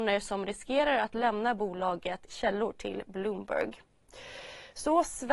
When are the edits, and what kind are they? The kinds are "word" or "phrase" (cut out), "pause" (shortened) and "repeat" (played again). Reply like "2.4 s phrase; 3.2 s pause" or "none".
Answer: 2.3 s word